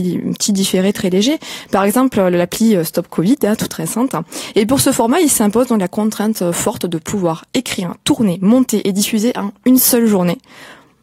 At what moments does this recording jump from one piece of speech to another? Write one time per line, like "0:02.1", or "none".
0:07.5